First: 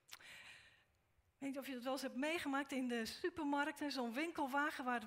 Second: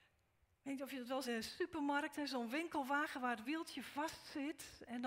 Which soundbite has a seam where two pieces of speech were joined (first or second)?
second